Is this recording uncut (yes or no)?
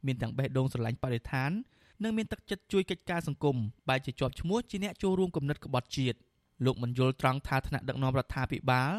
yes